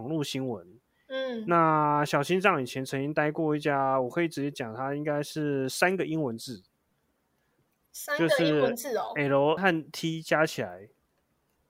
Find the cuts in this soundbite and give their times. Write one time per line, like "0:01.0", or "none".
0:07.9
0:09.6